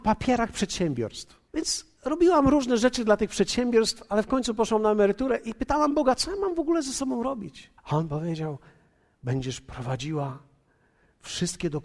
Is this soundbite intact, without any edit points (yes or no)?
no